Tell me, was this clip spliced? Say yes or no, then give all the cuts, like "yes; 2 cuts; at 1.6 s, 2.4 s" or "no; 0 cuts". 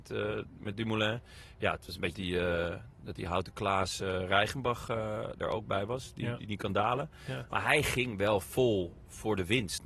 yes; 1 cut; at 2.1 s